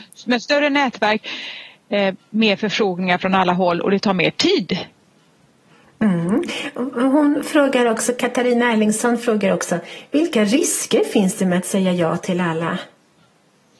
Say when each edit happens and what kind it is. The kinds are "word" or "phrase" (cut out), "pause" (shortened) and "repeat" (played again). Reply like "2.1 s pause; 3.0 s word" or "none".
none